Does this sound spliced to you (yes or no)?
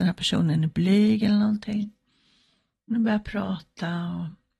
no